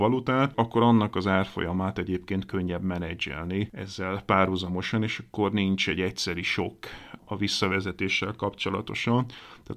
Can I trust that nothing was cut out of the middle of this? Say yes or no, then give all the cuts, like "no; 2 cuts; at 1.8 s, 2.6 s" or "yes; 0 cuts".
yes; 0 cuts